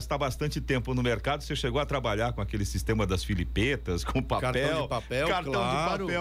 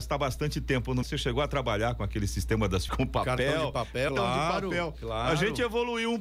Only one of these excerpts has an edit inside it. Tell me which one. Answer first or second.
second